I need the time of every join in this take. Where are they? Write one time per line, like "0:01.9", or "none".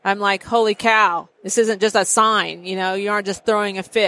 0:01.3